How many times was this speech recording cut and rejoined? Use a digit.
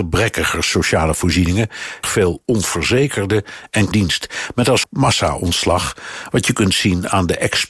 3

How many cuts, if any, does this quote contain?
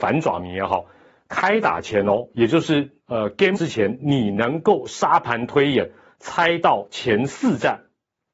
1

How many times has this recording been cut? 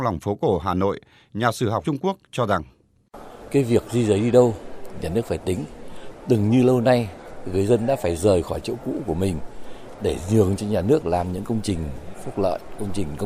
1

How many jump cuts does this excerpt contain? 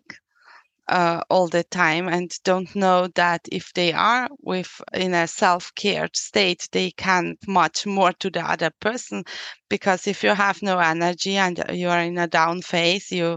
2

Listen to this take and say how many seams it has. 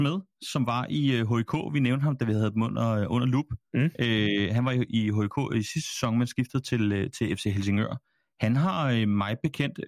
0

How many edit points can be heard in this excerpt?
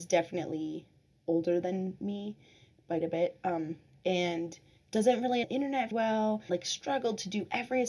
4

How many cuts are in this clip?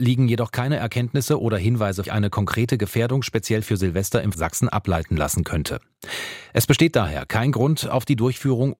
2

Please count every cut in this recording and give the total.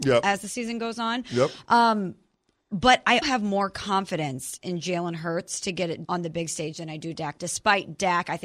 3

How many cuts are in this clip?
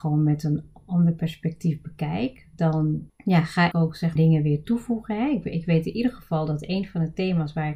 3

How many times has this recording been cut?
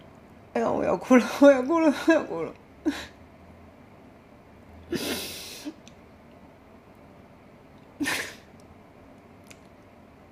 0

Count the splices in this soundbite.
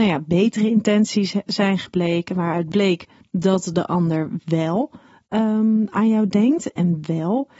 0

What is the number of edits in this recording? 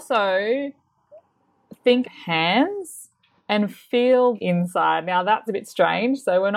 3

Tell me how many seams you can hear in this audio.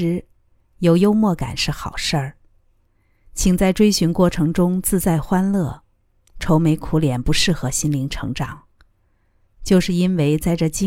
0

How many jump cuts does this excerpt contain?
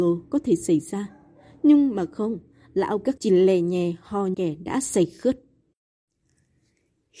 2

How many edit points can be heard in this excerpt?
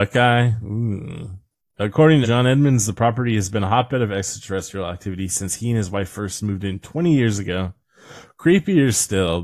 1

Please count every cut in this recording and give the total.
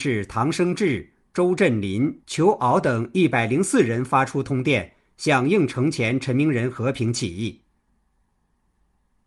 0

